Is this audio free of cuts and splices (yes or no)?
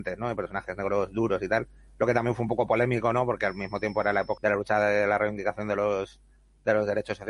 no